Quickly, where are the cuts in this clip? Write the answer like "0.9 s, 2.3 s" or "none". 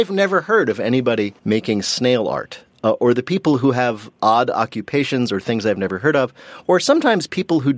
1.4 s